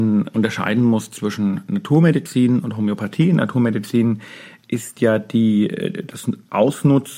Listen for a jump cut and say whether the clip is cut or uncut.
uncut